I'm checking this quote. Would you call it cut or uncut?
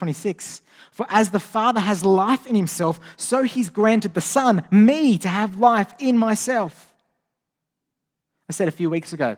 uncut